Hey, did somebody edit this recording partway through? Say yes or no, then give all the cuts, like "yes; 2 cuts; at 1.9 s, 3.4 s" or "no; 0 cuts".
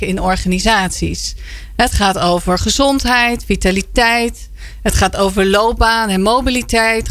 no; 0 cuts